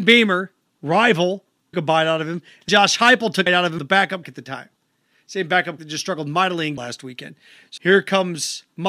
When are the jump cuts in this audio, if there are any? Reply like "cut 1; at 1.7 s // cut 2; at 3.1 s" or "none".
cut 1; at 1.7 s // cut 2; at 2.7 s // cut 3; at 3.5 s // cut 4; at 3.8 s // cut 5; at 4.2 s // cut 6; at 5.8 s // cut 7; at 6.8 s // cut 8; at 7.8 s